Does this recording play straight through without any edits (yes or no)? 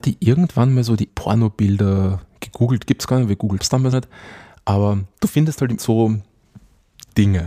no